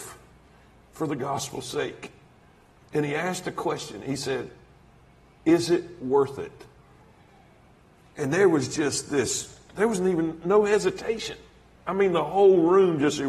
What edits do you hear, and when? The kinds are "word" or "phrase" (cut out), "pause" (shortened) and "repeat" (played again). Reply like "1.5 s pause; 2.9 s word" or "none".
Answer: none